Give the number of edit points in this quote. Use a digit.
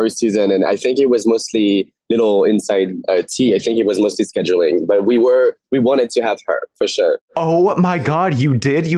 0